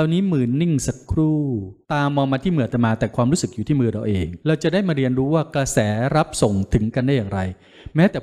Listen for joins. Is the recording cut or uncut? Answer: cut